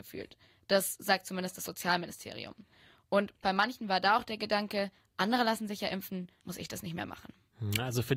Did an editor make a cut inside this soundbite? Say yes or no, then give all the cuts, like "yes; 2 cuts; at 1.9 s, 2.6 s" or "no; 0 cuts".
yes; 1 cut; at 6.4 s